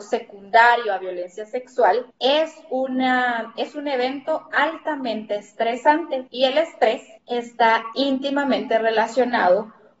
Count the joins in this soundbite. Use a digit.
3